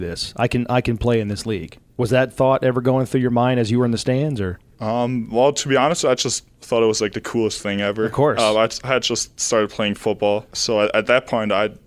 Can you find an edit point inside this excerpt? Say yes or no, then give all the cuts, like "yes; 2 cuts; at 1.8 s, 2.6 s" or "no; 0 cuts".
no; 0 cuts